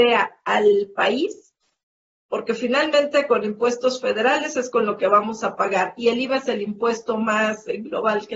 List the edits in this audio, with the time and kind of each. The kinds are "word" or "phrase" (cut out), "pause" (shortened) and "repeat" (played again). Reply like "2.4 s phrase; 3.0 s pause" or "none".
none